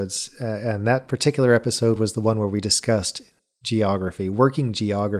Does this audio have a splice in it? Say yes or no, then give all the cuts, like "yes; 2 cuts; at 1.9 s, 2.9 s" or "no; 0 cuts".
no; 0 cuts